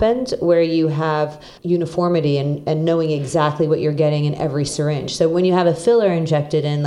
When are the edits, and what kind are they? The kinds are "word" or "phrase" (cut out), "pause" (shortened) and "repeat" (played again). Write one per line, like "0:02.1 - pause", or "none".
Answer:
0:01.6 - pause